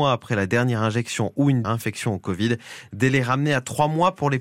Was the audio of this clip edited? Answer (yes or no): yes